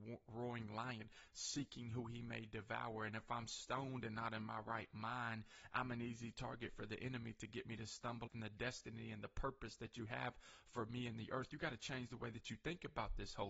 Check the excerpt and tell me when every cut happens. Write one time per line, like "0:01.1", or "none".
0:08.3